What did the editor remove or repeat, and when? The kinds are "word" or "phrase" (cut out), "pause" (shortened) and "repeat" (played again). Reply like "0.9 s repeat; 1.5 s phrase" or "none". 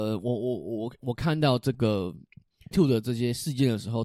2.7 s word